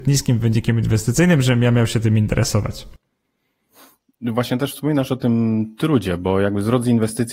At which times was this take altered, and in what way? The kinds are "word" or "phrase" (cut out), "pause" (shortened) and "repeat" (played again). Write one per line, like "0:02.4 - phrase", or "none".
none